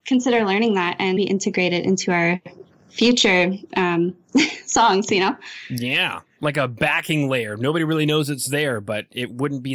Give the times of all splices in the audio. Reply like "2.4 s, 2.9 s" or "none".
1.2 s